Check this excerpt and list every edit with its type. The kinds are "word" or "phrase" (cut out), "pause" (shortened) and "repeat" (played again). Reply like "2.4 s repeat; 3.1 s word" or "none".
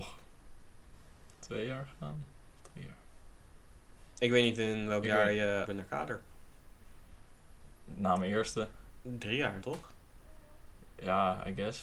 5.7 s word; 9.6 s word